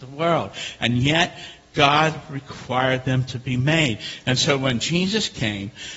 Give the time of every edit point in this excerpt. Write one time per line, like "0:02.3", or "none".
none